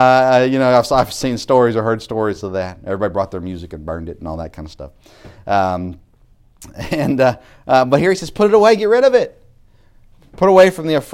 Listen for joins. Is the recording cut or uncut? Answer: uncut